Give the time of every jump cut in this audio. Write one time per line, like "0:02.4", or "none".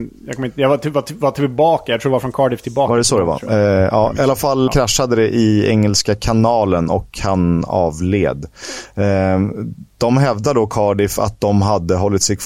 0:04.7